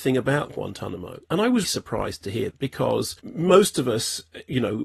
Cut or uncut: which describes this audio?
cut